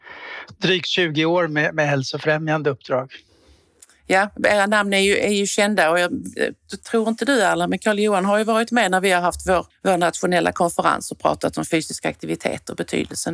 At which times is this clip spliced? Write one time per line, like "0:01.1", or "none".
0:09.7